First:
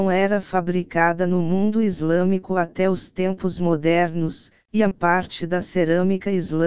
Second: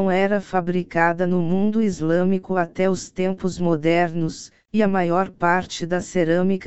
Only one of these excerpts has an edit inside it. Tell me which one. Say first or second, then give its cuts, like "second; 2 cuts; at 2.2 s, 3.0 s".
first; 1 cut; at 4.9 s